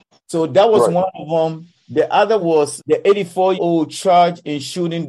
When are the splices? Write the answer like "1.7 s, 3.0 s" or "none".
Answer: 2.4 s, 2.8 s, 3.6 s